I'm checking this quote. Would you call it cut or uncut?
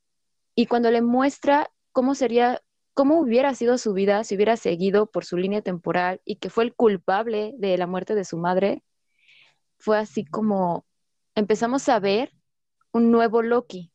uncut